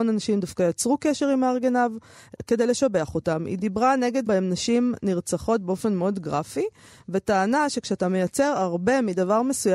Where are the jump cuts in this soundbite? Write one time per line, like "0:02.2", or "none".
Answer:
0:04.3